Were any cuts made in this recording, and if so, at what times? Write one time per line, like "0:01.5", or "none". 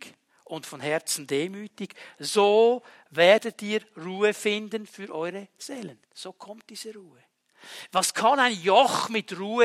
0:06.0